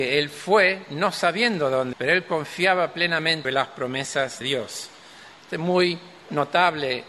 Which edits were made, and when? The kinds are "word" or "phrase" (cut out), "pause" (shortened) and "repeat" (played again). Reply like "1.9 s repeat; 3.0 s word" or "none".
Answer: 1.9 s word; 3.4 s phrase; 4.4 s word